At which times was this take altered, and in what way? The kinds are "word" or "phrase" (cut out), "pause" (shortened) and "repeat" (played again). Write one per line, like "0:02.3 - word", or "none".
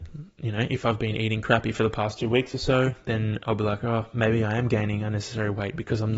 none